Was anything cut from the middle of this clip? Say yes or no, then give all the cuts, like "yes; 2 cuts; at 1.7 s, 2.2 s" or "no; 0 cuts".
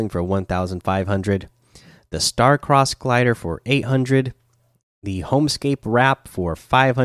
no; 0 cuts